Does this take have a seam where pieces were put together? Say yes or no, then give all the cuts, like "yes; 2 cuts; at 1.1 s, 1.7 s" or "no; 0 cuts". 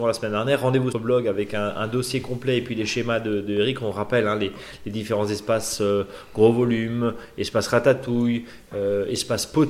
yes; 1 cut; at 0.9 s